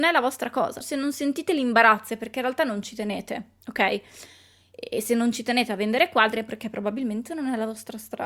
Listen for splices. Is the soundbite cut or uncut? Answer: uncut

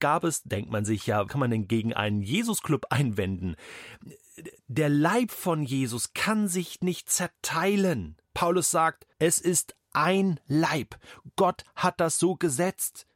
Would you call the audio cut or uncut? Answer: cut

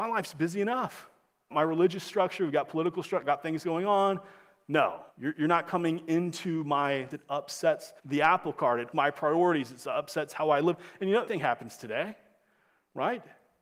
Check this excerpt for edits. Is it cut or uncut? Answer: cut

